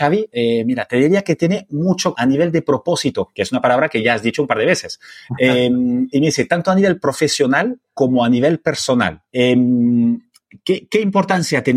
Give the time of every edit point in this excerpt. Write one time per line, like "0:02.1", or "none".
0:02.1
0:07.8
0:09.3